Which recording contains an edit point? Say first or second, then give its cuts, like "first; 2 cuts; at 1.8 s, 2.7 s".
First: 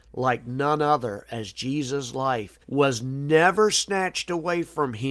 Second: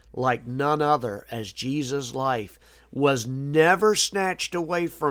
first; 1 cut; at 2.6 s